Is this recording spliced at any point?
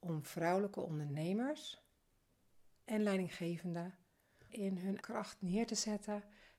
yes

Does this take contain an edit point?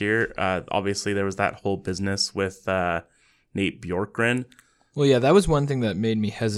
no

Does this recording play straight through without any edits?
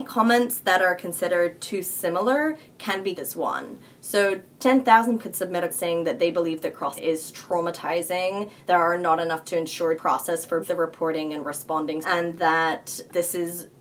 no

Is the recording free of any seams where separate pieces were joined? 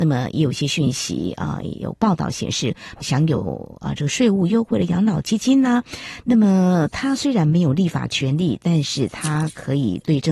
no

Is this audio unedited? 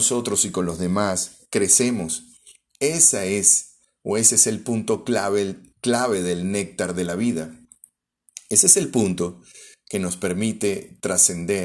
yes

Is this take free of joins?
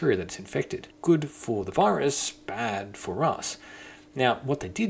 no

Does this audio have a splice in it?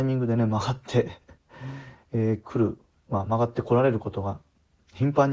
yes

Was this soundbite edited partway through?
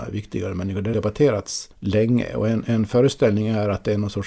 yes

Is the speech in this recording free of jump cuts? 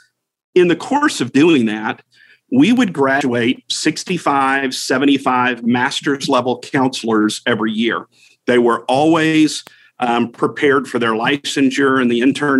yes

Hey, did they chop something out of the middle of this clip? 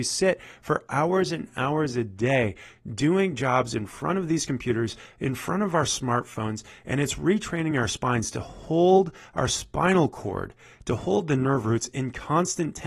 no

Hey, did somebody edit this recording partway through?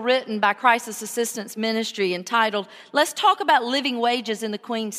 no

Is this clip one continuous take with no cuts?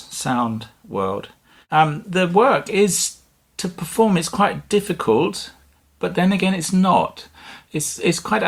yes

